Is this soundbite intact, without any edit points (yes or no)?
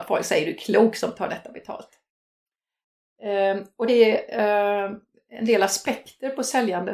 no